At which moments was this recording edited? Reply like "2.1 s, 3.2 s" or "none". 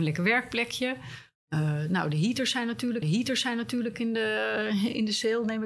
3.0 s